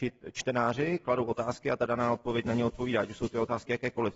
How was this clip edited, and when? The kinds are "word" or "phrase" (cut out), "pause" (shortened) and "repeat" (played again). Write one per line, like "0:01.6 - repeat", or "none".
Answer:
none

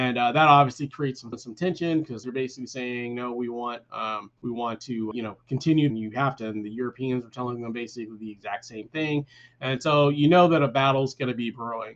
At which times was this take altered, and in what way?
0:01.3 - phrase
0:02.2 - phrase
0:04.4 - pause
0:05.1 - word
0:05.9 - phrase
0:06.4 - phrase

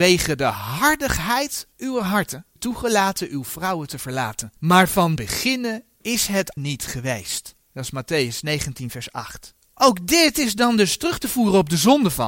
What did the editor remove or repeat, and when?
0:01.7 - pause
0:02.6 - word
0:04.6 - pause
0:05.2 - word
0:06.6 - word
0:07.6 - pause
0:09.6 - pause

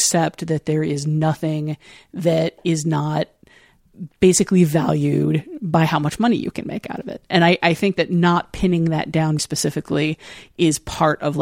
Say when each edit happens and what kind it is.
0:09.4 - word

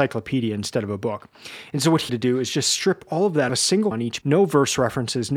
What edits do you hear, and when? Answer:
0:02.1 - word
0:03.5 - phrase
0:03.9 - word
0:04.2 - word

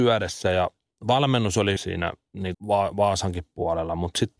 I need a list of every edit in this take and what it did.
0:01.8 - word
0:02.5 - word

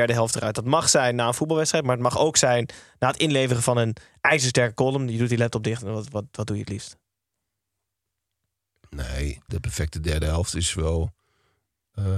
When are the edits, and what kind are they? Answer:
0:09.5 - word

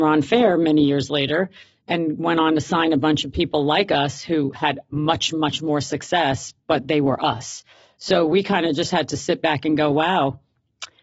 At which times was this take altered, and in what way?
none

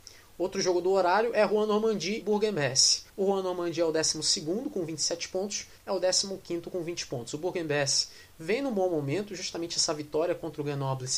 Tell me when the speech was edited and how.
0:02.2 - word
0:03.1 - pause
0:05.8 - phrase

